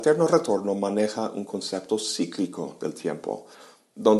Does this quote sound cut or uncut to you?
uncut